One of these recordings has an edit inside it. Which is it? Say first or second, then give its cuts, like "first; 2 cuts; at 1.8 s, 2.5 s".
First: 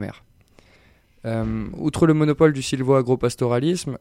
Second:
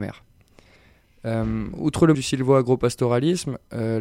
second; 1 cut; at 2.1 s